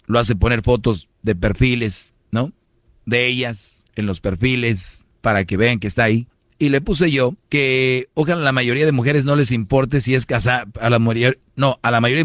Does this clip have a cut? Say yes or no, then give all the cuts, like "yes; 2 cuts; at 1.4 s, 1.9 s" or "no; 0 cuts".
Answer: yes; 6 cuts; at 1.1 s, 2.2 s, 3.9 s, 5.1 s, 6.3 s, 7.4 s